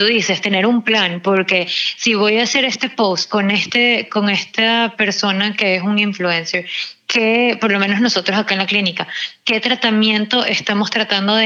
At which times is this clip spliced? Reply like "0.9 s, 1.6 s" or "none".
none